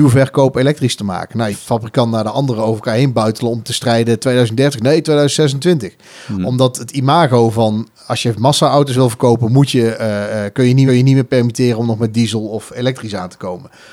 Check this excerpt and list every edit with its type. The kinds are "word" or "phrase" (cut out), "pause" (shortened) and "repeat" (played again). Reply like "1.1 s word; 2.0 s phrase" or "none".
1.5 s phrase; 3.6 s word; 10.9 s repeat